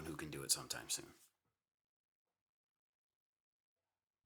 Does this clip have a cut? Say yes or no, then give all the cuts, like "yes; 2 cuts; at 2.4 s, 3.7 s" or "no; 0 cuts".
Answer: no; 0 cuts